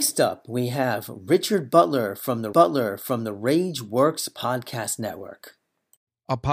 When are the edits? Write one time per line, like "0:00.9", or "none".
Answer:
0:02.5

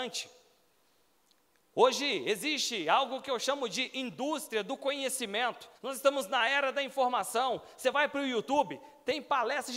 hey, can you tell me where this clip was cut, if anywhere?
0:05.8

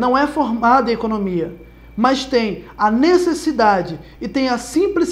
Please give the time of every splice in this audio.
none

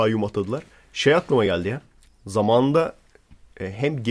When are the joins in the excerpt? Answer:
none

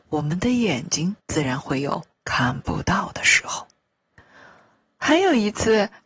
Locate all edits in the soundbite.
0:01.2
0:02.1
0:04.1

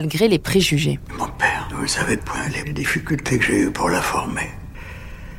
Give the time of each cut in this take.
0:02.2
0:02.6

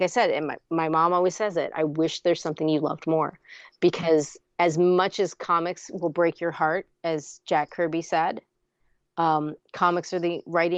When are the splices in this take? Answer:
none

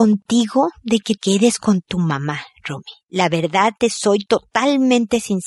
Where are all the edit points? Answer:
0:01.2
0:03.0

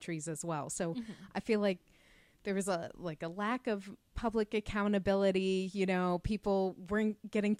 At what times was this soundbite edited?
none

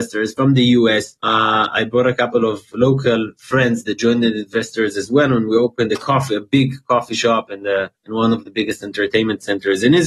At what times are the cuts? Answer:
0:01.2
0:08.0

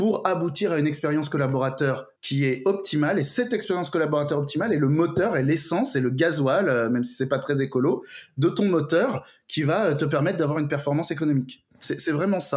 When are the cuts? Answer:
0:02.2

